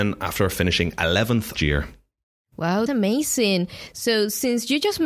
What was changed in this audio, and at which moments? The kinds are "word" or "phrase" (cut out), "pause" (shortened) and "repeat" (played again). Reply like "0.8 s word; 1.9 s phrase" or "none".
1.6 s word; 2.9 s word